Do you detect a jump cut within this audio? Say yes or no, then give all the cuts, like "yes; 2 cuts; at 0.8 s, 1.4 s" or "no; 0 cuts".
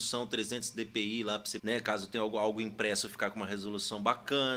yes; 1 cut; at 1.6 s